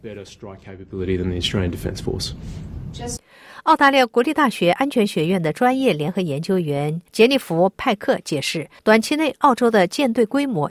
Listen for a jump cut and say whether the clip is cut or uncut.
cut